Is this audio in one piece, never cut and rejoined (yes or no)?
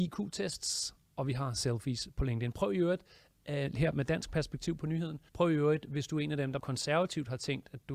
no